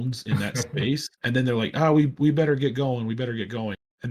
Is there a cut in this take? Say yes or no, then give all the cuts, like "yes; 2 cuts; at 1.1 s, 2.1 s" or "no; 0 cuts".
yes; 1 cut; at 1.1 s